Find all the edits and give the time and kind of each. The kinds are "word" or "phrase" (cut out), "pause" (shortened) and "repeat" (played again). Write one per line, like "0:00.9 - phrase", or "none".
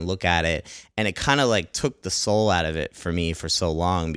none